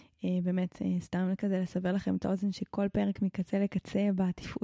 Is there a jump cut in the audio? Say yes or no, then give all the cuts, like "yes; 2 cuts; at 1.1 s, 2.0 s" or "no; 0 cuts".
no; 0 cuts